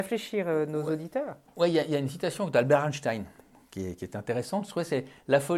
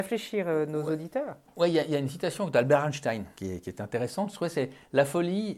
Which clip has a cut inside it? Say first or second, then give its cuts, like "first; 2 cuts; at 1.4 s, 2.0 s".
second; 1 cut; at 3.3 s